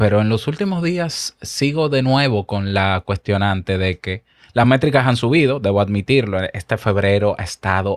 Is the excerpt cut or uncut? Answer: uncut